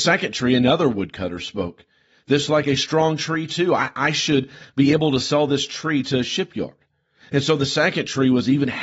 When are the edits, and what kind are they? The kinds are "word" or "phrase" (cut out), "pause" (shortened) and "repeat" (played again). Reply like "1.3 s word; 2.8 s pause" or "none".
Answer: 2.5 s word